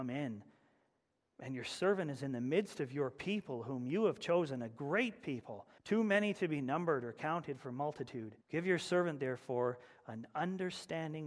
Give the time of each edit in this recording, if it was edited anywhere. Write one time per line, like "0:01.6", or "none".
0:05.8
0:08.4